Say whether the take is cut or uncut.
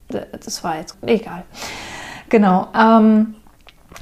cut